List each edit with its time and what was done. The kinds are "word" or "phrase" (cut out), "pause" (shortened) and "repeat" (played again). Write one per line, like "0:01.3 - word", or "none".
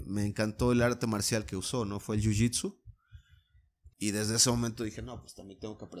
0:03.9 - pause